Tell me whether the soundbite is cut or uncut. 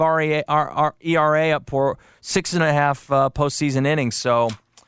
uncut